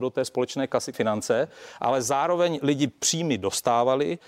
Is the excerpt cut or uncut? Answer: cut